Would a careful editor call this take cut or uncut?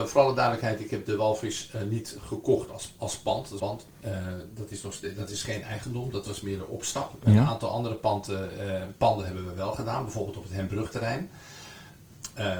cut